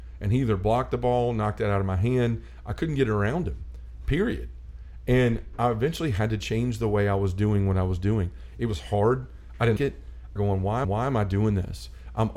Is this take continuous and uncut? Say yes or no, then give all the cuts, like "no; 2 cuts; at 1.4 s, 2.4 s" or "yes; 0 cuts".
no; 3 cuts; at 9.8 s, 10.4 s, 10.8 s